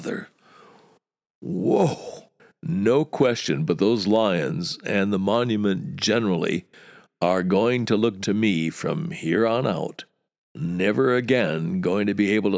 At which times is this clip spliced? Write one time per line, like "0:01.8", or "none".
0:08.2
0:10.3